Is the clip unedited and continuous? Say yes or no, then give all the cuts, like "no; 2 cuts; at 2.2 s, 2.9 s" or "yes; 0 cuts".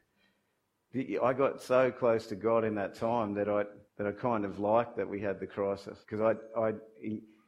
no; 2 cuts; at 3.9 s, 6.0 s